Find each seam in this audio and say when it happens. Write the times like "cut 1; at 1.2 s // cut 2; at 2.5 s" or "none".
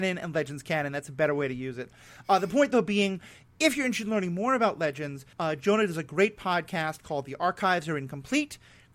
cut 1; at 5.3 s